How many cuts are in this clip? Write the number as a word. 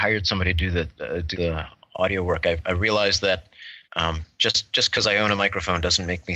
two